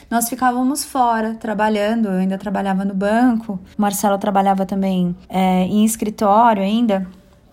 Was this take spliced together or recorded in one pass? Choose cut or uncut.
cut